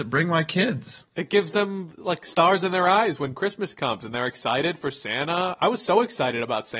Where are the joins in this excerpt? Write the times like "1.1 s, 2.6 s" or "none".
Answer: 1.1 s